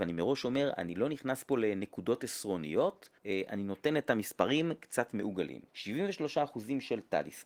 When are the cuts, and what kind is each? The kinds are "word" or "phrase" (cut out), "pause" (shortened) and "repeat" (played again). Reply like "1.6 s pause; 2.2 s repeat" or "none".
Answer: 3.2 s pause; 5.7 s pause